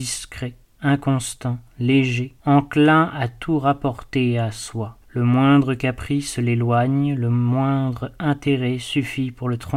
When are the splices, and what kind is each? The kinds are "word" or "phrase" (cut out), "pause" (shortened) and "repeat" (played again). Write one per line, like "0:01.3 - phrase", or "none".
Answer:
0:02.4 - pause
0:05.0 - pause